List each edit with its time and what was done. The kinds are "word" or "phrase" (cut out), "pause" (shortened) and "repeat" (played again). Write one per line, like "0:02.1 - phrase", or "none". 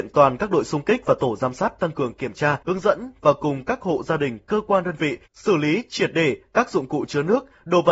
0:02.6 - pause
0:05.3 - pause

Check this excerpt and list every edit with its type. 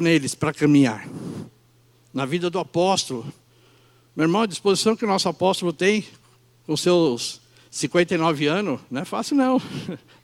none

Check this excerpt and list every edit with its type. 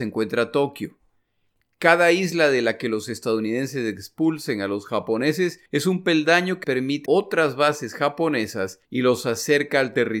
0:05.7 - pause
0:06.6 - word
0:07.1 - word
0:08.8 - pause

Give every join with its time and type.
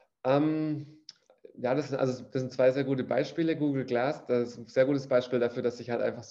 none

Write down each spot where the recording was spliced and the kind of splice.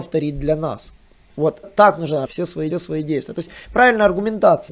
0:01.6 - word
0:02.2 - word
0:02.7 - repeat

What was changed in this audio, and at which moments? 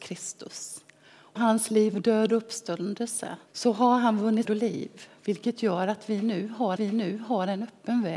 0:01.4 - word
0:03.5 - pause
0:04.4 - phrase
0:06.8 - repeat

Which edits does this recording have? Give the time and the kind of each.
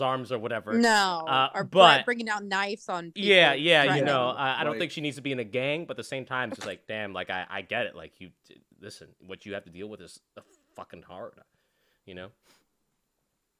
none

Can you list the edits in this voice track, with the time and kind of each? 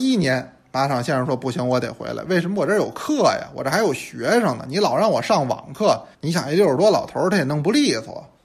0:06.1 - pause

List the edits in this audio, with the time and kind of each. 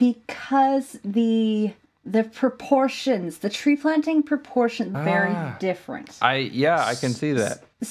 0:01.9 - pause
0:04.9 - phrase

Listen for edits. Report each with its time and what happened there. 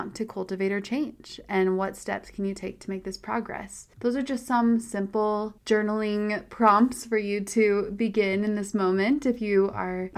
none

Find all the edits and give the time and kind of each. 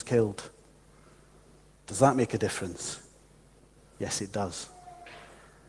none

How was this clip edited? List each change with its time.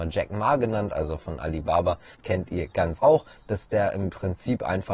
0:02.1 - pause
0:03.0 - word

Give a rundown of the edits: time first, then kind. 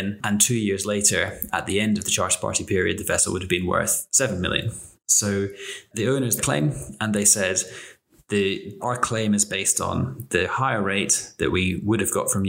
0:06.4 - phrase
0:08.8 - word

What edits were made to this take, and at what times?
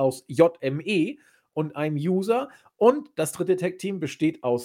none

